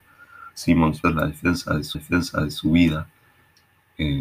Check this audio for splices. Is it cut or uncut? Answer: cut